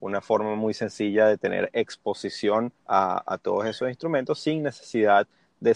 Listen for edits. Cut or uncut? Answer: cut